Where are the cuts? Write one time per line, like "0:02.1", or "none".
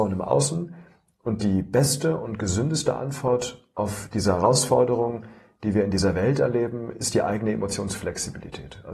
none